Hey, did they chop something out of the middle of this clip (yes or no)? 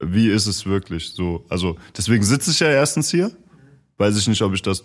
no